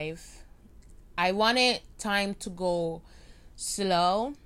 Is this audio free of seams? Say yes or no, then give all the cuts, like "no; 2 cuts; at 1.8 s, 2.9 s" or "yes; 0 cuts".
yes; 0 cuts